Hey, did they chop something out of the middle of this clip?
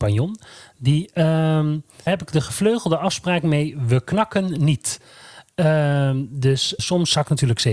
yes; 2 cuts; at 2.1 s, 6.8 s

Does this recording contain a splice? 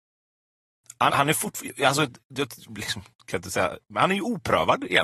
yes; 1 cut; at 1.1 s

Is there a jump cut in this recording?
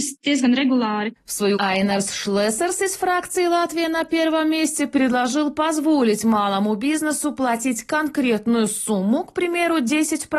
yes; 1 cut; at 1.6 s

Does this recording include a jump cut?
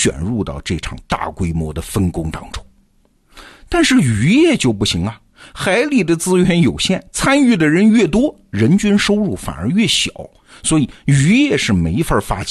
no; 0 cuts

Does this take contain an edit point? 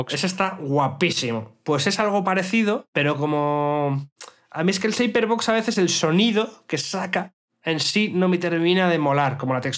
no; 0 cuts

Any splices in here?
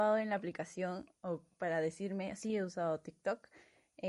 no; 0 cuts

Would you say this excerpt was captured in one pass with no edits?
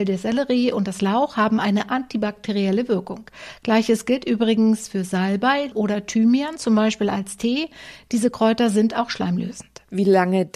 no; 1 cut; at 5.7 s

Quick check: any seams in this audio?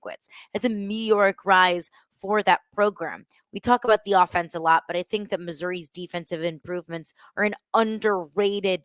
no; 0 cuts

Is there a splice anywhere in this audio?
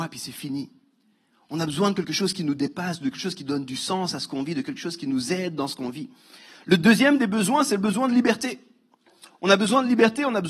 no; 0 cuts

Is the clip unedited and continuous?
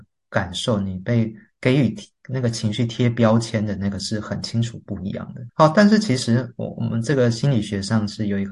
yes; 0 cuts

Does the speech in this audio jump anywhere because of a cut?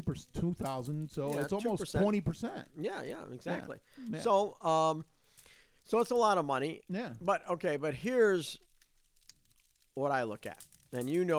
no; 0 cuts

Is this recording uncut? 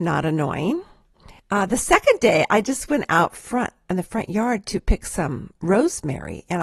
no; 1 cut; at 1.4 s

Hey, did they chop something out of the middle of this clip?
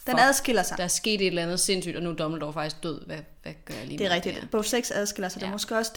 no; 0 cuts

